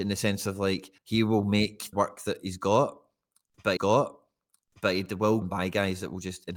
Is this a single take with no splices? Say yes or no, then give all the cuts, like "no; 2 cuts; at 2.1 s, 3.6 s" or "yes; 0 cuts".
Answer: no; 4 cuts; at 1.0 s, 1.9 s, 3.8 s, 5.4 s